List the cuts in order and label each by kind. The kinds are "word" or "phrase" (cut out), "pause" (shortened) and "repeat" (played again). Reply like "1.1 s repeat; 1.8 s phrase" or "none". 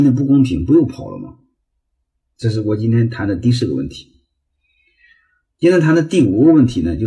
none